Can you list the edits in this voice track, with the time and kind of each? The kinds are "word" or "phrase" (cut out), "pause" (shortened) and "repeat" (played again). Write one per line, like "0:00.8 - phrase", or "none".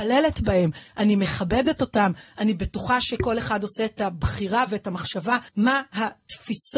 0:05.5 - pause